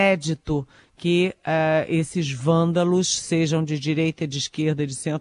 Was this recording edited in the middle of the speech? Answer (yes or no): no